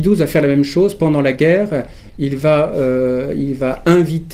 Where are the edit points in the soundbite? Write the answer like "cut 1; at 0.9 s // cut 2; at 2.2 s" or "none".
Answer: none